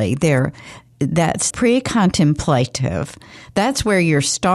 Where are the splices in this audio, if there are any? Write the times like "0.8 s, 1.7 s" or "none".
1.5 s